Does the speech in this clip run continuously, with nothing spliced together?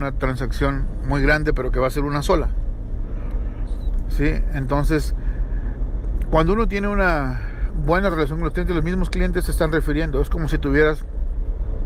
yes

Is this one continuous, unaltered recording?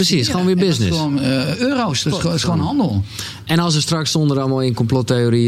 yes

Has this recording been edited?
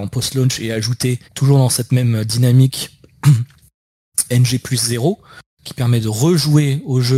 yes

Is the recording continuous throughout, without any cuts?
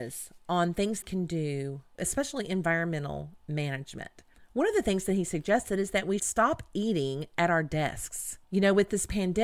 no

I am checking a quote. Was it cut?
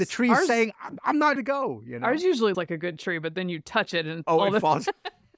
yes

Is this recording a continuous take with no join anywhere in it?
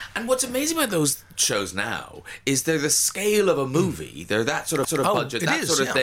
no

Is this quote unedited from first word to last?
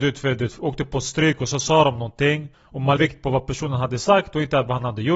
no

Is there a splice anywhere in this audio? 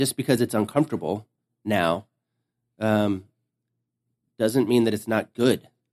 no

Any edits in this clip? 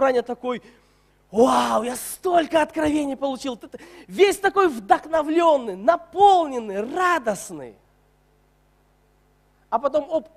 no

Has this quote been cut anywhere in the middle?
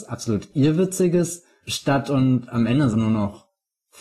yes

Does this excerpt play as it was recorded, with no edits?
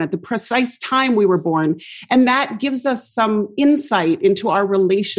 yes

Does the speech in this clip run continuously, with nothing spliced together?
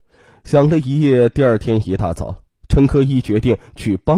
no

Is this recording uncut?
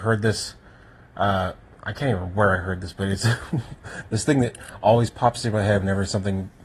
yes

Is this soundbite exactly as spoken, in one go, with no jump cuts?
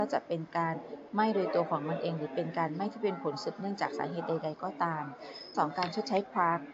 no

